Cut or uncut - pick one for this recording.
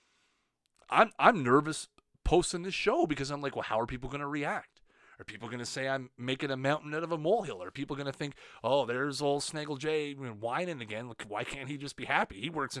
uncut